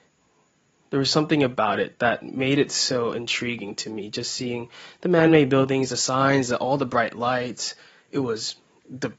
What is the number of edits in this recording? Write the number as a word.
zero